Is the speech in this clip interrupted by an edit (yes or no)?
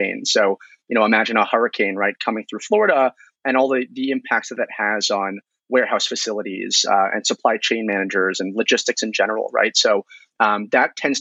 no